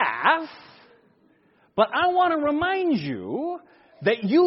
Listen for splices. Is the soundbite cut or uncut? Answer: uncut